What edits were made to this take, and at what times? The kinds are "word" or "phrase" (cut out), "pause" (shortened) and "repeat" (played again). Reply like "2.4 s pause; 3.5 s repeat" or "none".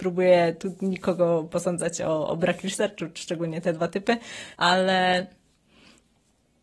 4.5 s pause